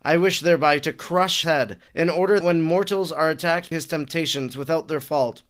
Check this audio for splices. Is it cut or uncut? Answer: cut